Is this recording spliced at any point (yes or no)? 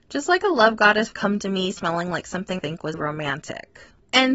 yes